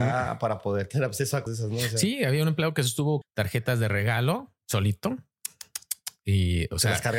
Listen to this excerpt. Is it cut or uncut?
cut